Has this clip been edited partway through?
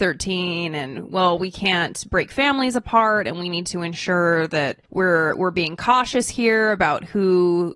yes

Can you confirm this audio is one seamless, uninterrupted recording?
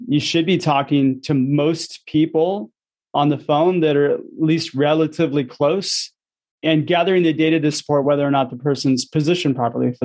yes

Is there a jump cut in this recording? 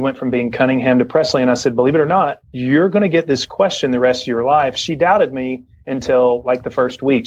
no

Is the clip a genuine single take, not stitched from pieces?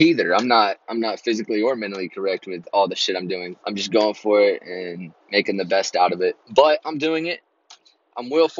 no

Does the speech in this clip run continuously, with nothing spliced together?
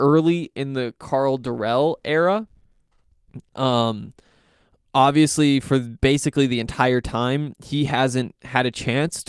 yes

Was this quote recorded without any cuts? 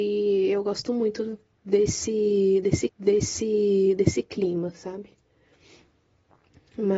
no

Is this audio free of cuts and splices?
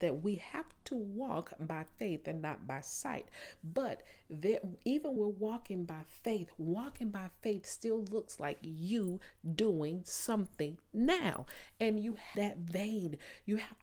no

